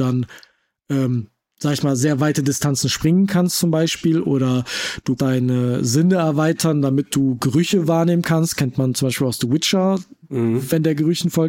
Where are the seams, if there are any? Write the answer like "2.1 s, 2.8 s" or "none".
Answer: 5.2 s